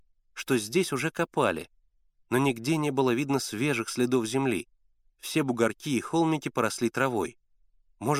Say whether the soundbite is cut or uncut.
uncut